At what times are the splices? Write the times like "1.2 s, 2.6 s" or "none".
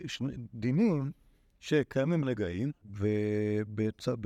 2.2 s, 2.8 s